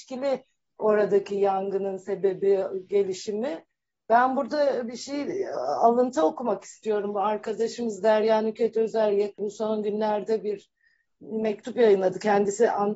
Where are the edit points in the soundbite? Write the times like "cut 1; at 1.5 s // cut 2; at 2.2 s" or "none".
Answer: none